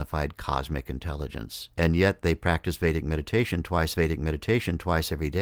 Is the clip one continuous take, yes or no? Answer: no